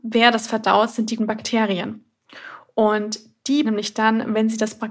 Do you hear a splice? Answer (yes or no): yes